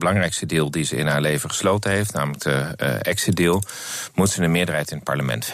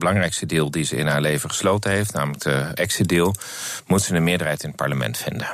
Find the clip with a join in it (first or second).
second